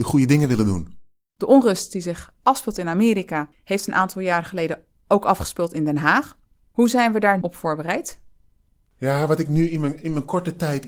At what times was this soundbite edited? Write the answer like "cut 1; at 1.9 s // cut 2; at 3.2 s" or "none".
cut 1; at 7.4 s

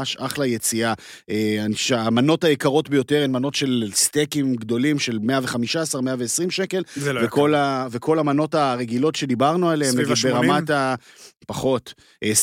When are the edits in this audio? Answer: none

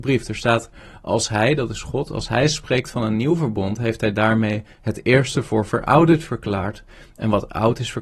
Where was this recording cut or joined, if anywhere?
none

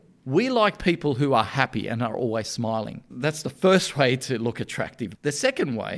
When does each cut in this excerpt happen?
none

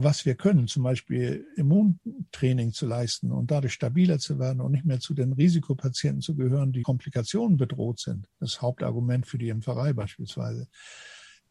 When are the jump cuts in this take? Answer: cut 1; at 6.8 s // cut 2; at 8.3 s

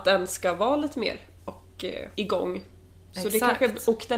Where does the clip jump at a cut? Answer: cut 1; at 1.4 s // cut 2; at 2.1 s

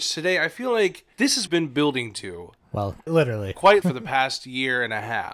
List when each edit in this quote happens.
cut 1; at 1.1 s // cut 2; at 1.5 s // cut 3; at 3.1 s // cut 4; at 3.8 s

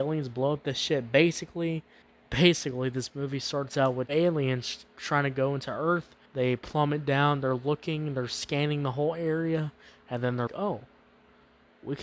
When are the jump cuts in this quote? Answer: cut 1; at 2.0 s // cut 2; at 4.1 s // cut 3; at 6.3 s // cut 4; at 10.5 s

